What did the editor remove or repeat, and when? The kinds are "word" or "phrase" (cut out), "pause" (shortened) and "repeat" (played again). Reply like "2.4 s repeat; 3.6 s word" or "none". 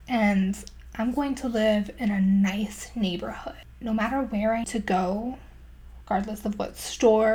3.7 s word; 4.6 s word

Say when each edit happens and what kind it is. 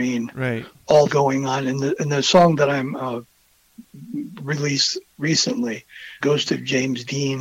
1.1 s word; 6.2 s word

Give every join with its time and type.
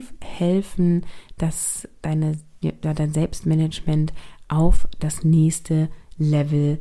none

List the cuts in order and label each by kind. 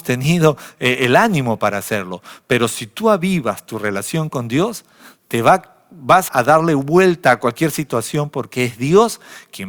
6.3 s word

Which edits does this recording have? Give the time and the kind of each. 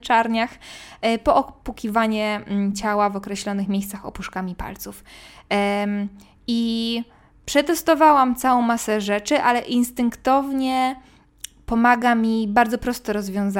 none

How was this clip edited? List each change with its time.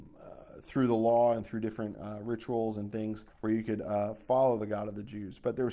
3.3 s pause

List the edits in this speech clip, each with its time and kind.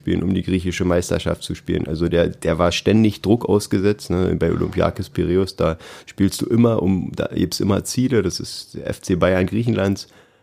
none

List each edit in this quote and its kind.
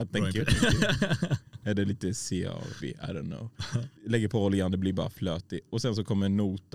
2.8 s word; 4.0 s pause

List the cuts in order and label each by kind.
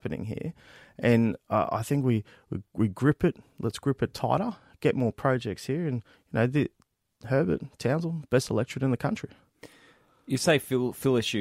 none

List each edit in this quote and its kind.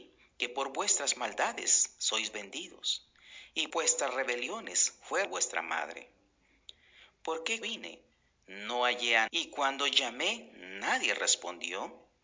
3.7 s word; 5.2 s word; 7.6 s word; 9.3 s word

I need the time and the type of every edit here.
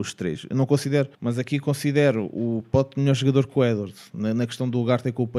1.1 s pause

